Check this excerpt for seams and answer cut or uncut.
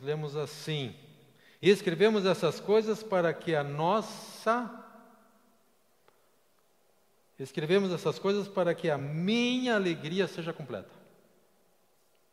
uncut